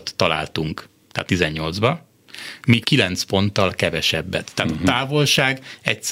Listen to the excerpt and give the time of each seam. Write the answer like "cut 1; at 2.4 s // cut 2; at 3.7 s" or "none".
cut 1; at 1.3 s // cut 2; at 2.8 s